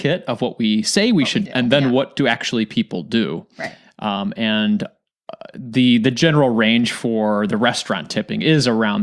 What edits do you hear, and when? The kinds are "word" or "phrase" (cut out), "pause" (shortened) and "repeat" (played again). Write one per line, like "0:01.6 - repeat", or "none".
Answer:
0:01.4 - phrase